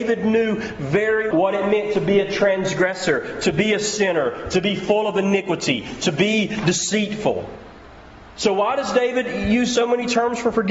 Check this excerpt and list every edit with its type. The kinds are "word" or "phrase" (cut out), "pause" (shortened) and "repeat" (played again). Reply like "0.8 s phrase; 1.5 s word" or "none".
1.3 s word